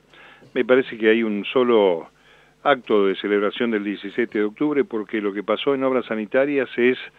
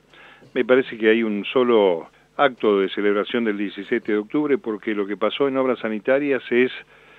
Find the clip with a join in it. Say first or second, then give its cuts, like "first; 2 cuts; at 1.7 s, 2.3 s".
second; 1 cut; at 2.1 s